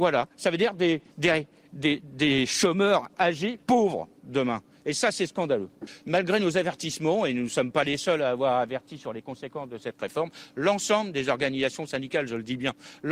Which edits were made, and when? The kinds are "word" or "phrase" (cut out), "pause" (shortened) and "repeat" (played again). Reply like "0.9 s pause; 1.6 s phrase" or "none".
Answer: 1.1 s pause; 3.6 s pause